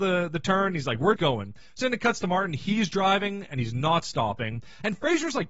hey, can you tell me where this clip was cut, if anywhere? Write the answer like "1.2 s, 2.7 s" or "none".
1.2 s